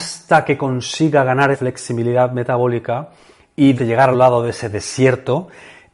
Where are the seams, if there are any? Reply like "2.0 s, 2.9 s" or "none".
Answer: 1.5 s, 3.7 s, 4.1 s